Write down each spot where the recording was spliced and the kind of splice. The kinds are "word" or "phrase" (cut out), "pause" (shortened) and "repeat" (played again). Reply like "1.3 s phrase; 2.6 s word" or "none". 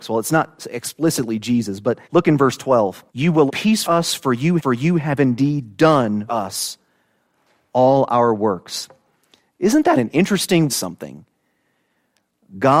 2.0 s pause; 3.1 s pause; 3.5 s word; 3.8 s word; 4.6 s repeat; 6.3 s word; 10.0 s word; 10.7 s phrase